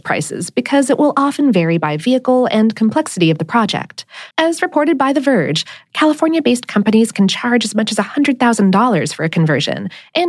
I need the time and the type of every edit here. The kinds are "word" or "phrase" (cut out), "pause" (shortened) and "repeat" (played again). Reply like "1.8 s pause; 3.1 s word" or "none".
4.3 s pause